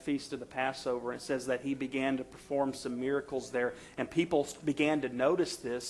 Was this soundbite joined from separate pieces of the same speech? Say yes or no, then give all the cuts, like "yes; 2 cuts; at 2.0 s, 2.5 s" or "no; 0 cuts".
no; 0 cuts